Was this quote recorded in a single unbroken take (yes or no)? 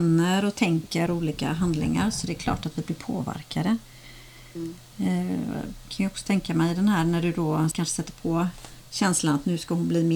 no